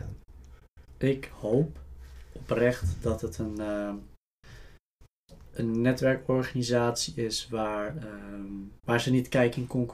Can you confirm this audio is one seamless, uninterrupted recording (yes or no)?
no